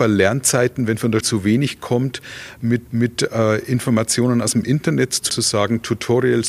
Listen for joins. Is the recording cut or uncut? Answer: cut